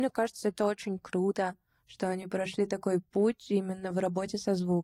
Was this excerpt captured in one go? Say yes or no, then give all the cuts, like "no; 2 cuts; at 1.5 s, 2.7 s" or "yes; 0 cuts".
yes; 0 cuts